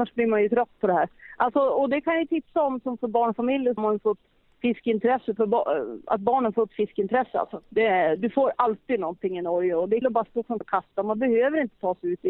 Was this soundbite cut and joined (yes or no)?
yes